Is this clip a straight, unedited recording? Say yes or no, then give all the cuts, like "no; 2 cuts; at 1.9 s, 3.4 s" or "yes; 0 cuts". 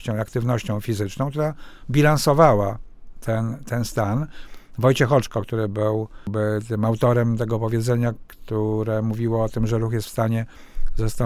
yes; 0 cuts